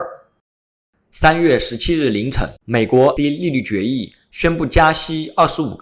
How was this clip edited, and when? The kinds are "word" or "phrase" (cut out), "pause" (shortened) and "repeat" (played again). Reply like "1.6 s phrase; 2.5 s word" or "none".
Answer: 2.6 s pause; 3.2 s word